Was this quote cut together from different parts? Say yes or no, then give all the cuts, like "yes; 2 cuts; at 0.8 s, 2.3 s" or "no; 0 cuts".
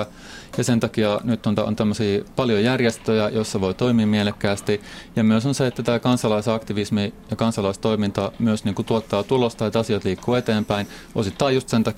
yes; 1 cut; at 1.6 s